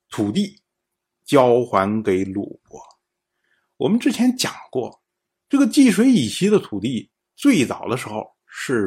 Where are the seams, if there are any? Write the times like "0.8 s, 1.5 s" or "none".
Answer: none